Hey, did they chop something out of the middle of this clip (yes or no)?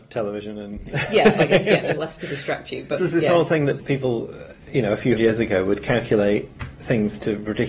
yes